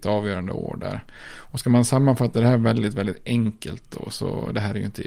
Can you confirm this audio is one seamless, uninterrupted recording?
yes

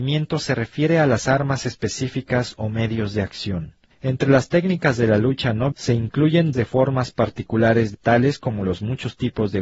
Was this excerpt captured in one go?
no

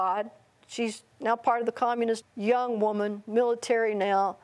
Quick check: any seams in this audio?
yes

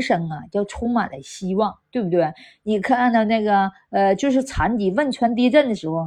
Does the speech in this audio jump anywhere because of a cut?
no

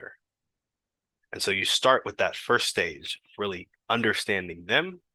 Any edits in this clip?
no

